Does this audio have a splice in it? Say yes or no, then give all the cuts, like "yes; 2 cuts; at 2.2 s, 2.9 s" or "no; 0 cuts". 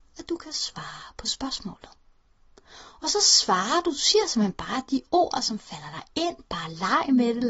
no; 0 cuts